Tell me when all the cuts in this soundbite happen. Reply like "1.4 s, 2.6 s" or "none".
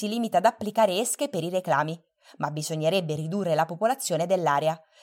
none